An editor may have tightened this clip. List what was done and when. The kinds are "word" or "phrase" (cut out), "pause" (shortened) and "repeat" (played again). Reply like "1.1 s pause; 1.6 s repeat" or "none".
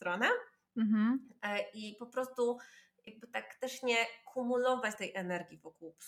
none